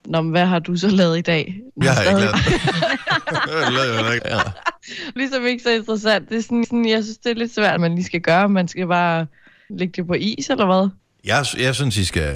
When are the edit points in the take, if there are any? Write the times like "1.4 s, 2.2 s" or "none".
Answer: 1.8 s, 2.3 s, 4.2 s, 5.2 s, 6.3 s, 6.6 s, 7.8 s, 9.7 s, 11.0 s